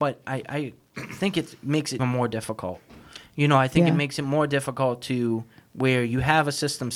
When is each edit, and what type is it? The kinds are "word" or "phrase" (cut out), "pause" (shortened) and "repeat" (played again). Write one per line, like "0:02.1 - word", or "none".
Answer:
0:02.0 - word

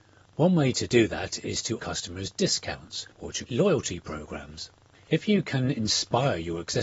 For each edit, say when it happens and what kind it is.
0:01.8 - phrase
0:03.1 - pause
0:03.5 - word
0:04.9 - pause

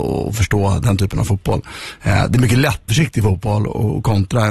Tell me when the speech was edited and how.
0:02.9 - phrase

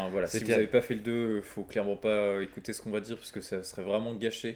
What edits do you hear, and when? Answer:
none

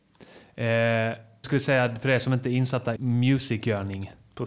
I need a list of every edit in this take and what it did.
0:01.4 - word
0:03.0 - word

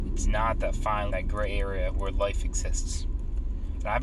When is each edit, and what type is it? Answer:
0:01.1 - phrase

